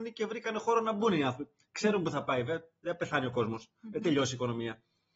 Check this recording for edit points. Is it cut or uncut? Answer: uncut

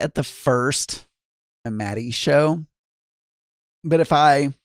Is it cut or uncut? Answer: cut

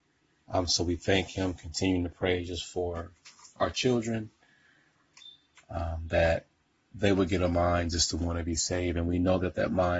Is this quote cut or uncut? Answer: uncut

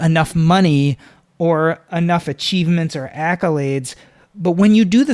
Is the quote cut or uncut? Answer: uncut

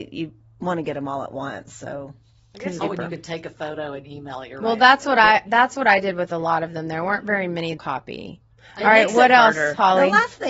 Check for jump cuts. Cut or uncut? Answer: cut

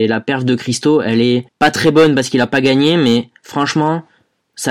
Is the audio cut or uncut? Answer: cut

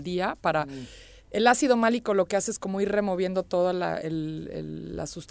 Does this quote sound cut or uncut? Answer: uncut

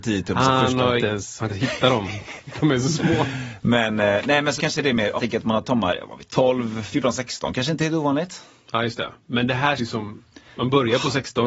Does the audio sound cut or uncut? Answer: cut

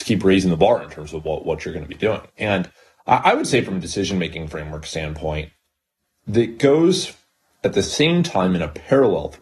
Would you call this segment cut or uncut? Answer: uncut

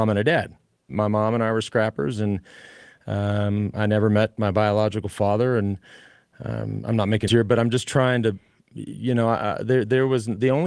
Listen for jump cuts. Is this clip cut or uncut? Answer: cut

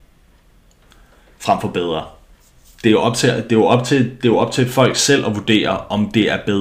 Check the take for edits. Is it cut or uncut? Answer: uncut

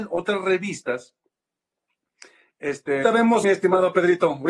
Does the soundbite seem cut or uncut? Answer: cut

